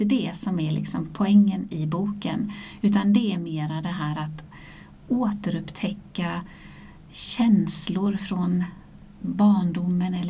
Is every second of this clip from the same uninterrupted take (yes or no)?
yes